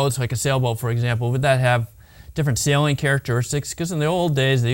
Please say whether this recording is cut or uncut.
uncut